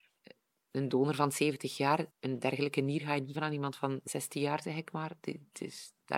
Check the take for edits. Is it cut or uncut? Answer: cut